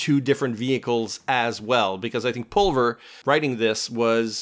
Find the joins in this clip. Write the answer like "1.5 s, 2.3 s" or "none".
none